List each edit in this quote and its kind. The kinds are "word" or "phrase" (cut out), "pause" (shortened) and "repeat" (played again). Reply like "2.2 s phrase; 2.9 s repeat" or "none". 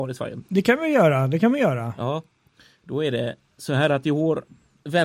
none